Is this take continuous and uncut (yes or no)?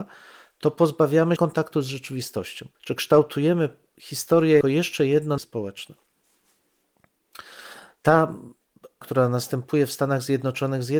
no